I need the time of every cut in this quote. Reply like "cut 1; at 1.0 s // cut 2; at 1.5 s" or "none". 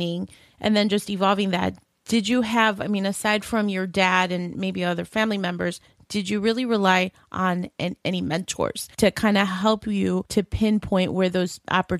none

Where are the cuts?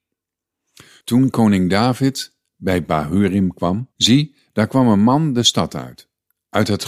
cut 1; at 3.9 s

